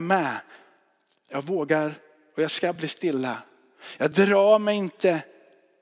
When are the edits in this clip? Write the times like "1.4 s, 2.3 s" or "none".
none